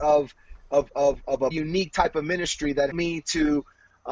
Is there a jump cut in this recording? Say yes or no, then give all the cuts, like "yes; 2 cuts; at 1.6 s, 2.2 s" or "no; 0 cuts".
yes; 2 cuts; at 1.5 s, 2.9 s